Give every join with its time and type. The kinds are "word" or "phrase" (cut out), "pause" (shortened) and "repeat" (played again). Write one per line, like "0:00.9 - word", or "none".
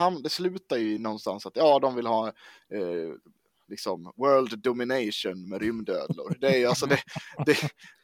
none